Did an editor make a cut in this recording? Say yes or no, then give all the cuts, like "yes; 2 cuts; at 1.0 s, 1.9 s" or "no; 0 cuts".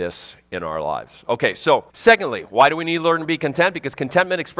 yes; 1 cut; at 1.9 s